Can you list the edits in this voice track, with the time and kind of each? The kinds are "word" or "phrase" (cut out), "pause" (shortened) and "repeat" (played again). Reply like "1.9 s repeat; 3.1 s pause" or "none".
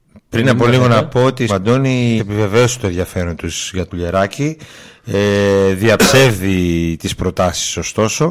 1.5 s word; 2.2 s phrase; 3.9 s word